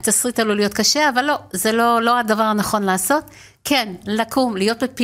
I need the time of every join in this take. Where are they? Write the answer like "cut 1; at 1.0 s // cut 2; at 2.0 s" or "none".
none